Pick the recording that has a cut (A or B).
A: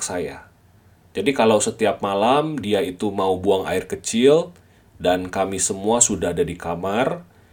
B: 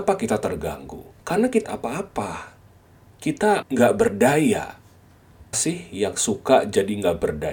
B